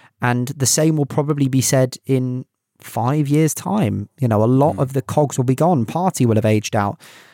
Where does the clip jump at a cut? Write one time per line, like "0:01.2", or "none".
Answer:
0:02.6